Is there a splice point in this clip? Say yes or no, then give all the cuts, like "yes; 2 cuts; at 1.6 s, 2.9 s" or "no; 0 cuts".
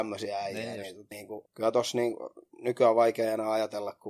yes; 2 cuts; at 1.1 s, 1.5 s